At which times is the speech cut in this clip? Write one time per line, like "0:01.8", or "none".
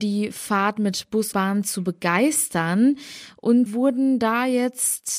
0:01.3
0:03.7